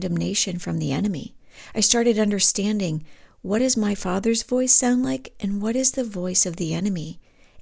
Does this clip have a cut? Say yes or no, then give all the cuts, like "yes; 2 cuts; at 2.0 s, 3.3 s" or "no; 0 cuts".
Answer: no; 0 cuts